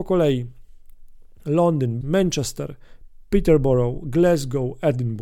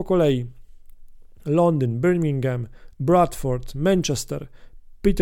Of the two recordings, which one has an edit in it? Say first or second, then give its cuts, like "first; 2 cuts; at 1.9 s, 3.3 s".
first; 1 cut; at 2.0 s